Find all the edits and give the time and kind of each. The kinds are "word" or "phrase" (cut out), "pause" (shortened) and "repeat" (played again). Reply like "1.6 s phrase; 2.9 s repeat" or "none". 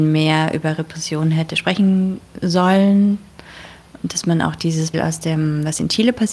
4.9 s word

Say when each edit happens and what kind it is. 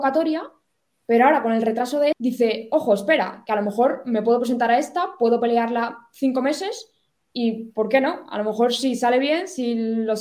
2.1 s word

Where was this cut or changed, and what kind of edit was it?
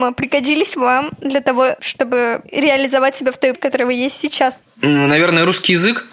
3.5 s word

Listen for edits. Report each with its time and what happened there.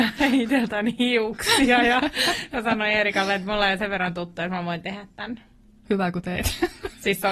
none

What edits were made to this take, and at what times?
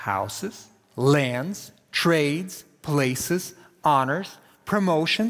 none

